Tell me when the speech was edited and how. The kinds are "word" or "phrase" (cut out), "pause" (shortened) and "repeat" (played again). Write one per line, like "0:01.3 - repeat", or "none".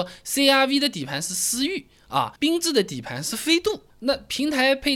0:02.4 - pause
0:03.9 - pause

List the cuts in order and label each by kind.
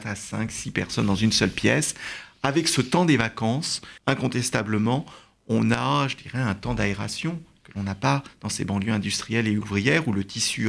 0:04.0 - pause

